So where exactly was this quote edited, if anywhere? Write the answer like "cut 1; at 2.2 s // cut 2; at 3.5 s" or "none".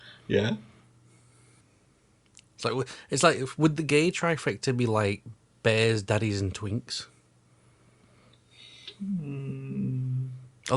none